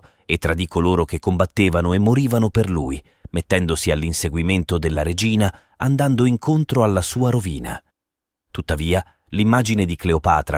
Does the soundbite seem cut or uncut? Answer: uncut